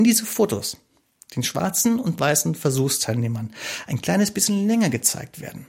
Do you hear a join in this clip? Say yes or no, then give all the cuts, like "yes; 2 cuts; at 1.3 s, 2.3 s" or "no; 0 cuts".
no; 0 cuts